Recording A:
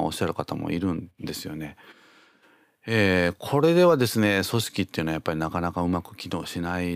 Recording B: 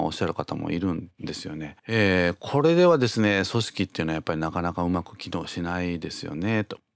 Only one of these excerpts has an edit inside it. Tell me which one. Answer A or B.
B